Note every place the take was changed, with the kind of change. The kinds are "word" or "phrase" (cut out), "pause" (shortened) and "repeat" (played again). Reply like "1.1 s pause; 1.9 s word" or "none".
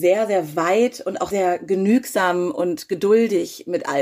1.3 s word